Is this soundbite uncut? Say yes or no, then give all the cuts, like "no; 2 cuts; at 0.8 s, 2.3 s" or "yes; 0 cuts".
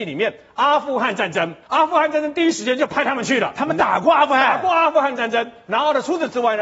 no; 1 cut; at 1.6 s